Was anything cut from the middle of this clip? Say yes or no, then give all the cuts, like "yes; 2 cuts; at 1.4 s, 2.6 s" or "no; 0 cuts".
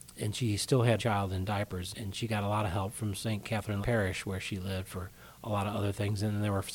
yes; 3 cuts; at 1.0 s, 1.9 s, 3.8 s